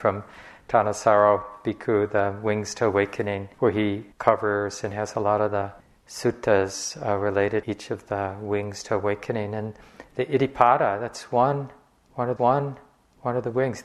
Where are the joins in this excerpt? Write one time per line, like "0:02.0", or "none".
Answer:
0:03.5
0:04.1
0:05.8
0:07.6
0:12.4